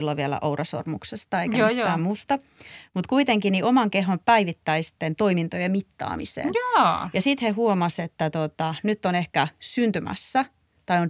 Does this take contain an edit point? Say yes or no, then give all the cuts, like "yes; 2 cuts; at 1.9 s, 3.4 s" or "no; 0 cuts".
no; 0 cuts